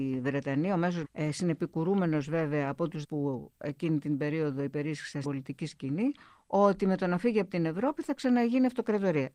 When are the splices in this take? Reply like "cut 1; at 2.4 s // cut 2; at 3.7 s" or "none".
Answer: cut 1; at 1.0 s // cut 2; at 3.0 s // cut 3; at 5.2 s

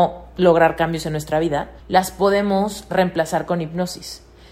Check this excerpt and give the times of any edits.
cut 1; at 1.8 s

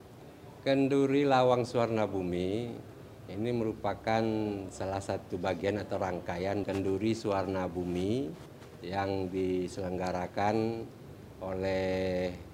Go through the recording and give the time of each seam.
cut 1; at 6.6 s

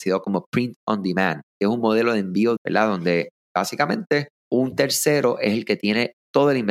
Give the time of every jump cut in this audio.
cut 1; at 1.5 s // cut 2; at 2.6 s // cut 3; at 4.4 s

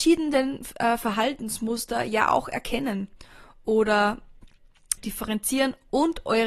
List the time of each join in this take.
cut 1; at 5.0 s

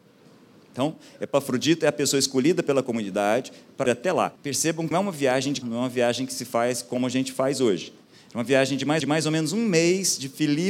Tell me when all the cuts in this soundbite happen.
cut 1; at 3.9 s // cut 2; at 4.4 s // cut 3; at 4.9 s // cut 4; at 5.6 s // cut 5; at 9.0 s

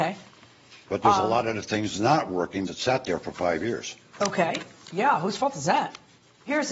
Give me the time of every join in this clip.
cut 1; at 2.7 s

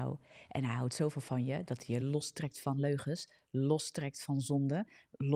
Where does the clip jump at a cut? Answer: none

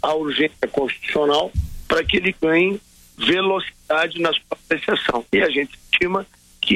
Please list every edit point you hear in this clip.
cut 1; at 5.3 s

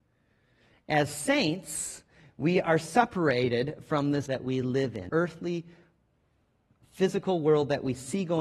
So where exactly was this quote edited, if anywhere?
cut 1; at 4.3 s // cut 2; at 5.1 s

